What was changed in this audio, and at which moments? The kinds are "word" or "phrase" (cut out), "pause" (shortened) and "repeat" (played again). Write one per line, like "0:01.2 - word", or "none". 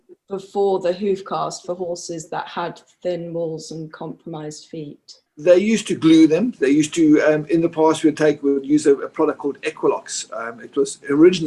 0:05.3 - pause